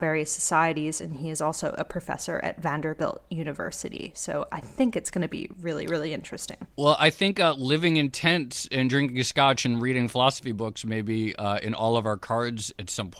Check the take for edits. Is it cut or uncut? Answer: cut